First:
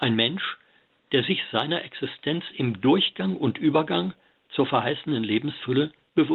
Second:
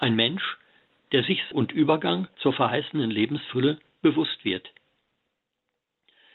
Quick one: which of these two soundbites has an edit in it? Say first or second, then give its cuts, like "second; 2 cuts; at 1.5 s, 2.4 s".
second; 2 cuts; at 1.5 s, 2.4 s